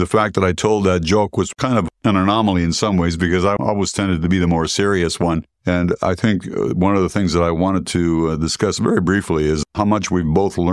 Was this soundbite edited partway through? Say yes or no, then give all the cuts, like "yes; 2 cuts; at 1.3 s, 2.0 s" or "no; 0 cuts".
yes; 1 cut; at 5.5 s